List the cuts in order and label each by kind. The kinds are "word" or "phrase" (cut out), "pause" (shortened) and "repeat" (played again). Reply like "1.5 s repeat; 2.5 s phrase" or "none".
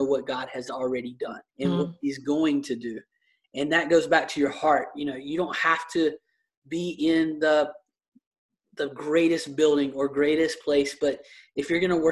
1.5 s pause